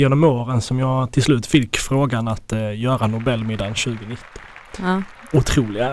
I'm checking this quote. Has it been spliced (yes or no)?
no